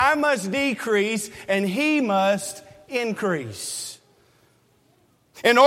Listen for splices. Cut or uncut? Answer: uncut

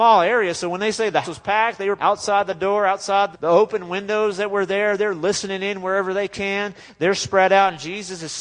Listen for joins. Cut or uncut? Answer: cut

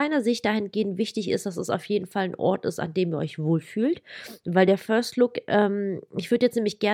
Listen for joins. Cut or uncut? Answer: uncut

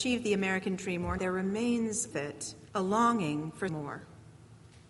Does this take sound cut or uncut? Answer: cut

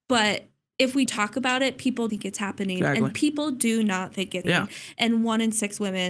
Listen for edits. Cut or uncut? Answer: cut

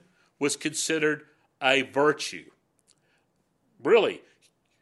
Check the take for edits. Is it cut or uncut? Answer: uncut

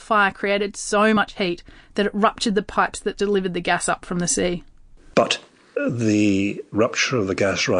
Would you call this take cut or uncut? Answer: uncut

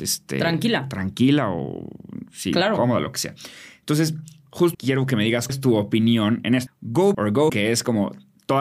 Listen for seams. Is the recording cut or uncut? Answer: cut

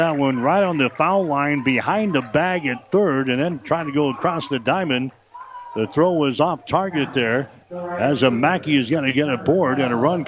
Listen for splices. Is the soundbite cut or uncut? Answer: cut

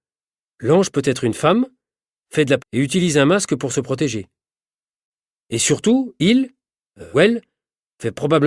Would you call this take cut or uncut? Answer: cut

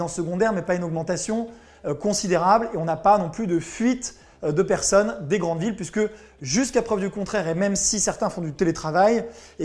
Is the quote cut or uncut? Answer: uncut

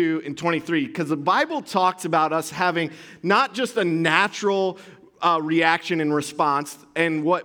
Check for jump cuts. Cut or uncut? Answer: uncut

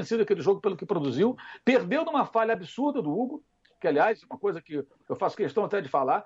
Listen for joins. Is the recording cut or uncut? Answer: uncut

